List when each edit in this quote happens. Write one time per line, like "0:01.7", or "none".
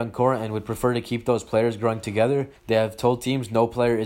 0:02.6